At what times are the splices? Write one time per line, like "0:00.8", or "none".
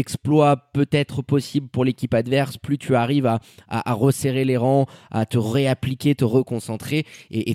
none